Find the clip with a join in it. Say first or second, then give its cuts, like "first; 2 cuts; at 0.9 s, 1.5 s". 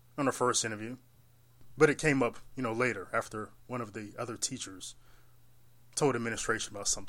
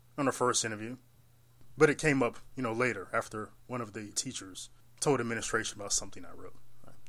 second; 2 cuts; at 4.1 s, 4.8 s